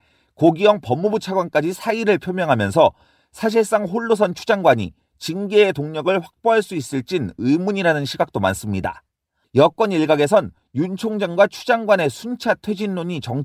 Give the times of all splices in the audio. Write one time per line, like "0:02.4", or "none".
none